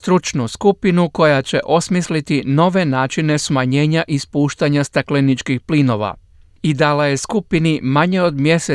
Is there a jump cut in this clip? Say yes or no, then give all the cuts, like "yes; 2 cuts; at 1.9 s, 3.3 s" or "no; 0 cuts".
no; 0 cuts